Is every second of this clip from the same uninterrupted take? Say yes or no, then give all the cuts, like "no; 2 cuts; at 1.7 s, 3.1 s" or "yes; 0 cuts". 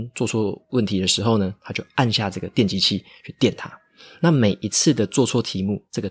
yes; 0 cuts